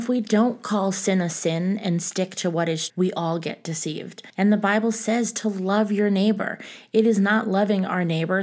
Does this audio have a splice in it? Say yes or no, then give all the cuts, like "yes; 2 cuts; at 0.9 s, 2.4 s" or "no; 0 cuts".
yes; 2 cuts; at 2.9 s, 4.3 s